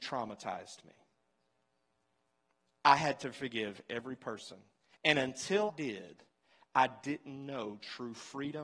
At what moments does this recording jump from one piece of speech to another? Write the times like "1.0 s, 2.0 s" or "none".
4.8 s, 5.7 s